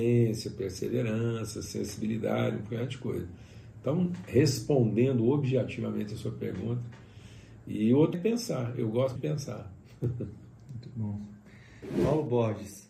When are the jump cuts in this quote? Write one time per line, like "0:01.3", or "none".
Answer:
0:08.1
0:09.2